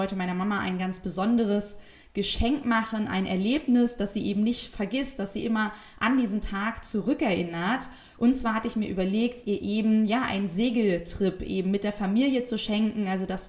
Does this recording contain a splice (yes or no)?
no